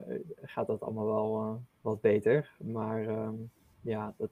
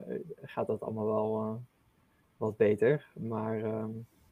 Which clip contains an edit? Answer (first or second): first